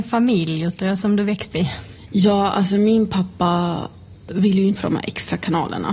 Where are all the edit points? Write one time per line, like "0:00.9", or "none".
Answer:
0:01.5
0:04.8